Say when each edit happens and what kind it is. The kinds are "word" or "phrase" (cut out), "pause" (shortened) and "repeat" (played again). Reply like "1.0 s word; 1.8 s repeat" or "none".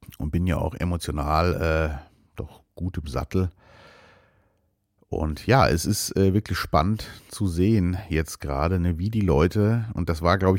none